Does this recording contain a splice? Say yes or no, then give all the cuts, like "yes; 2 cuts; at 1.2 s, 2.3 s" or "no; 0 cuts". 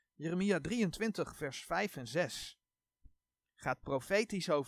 no; 0 cuts